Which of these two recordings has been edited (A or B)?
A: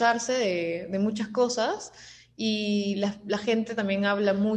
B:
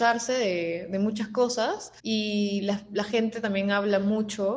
B